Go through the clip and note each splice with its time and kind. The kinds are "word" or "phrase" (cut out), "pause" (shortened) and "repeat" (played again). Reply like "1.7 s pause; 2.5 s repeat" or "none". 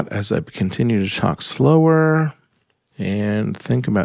none